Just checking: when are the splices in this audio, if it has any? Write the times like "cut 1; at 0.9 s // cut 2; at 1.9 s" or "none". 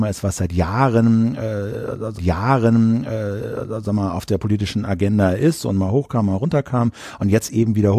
cut 1; at 2.2 s